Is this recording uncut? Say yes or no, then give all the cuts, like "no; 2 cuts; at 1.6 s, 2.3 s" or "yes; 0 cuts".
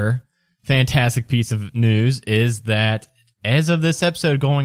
yes; 0 cuts